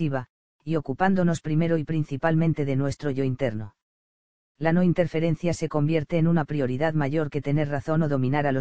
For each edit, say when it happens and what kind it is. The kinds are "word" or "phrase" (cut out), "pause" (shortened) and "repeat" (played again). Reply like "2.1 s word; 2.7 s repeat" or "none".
none